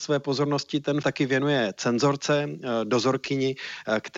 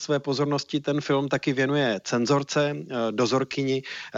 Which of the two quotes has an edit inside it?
first; 1 cut; at 1.0 s

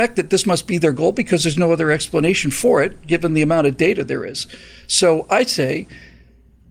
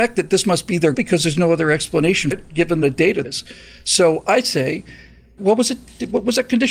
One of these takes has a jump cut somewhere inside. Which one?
second; 5 cuts; at 0.9 s, 2.3 s, 2.8 s, 3.2 s, 5.4 s

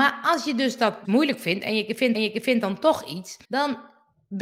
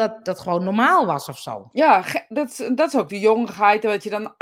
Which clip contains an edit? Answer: first; 3 cuts; at 1.0 s, 2.1 s, 3.4 s

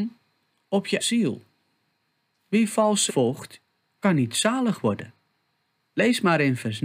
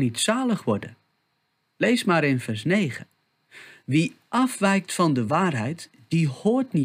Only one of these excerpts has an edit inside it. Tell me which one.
first; 2 cuts; at 1.0 s, 3.1 s

